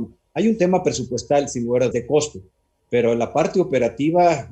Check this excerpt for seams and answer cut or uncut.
cut